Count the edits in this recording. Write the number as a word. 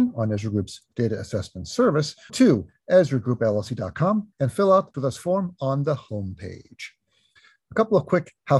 three